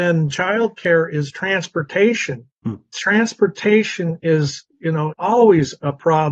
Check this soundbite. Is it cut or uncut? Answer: cut